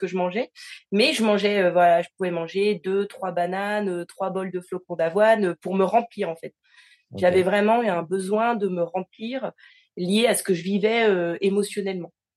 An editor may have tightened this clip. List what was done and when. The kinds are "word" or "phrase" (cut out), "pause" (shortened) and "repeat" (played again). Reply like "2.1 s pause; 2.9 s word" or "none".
none